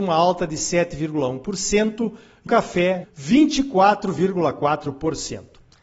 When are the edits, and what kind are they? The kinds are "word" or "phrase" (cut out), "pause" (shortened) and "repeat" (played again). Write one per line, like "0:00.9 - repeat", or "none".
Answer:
0:02.5 - word
0:03.0 - word